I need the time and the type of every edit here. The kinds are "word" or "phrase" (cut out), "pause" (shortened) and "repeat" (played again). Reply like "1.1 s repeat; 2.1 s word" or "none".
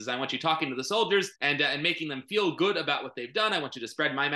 1.4 s pause